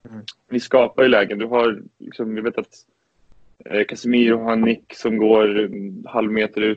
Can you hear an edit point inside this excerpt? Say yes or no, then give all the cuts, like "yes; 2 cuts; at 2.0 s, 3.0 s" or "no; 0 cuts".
no; 0 cuts